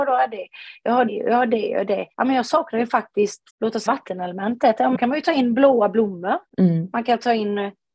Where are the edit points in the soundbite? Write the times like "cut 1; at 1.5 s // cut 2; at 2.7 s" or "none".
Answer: cut 1; at 1.1 s // cut 2; at 2.1 s // cut 3; at 3.5 s // cut 4; at 3.9 s // cut 5; at 4.9 s // cut 6; at 6.5 s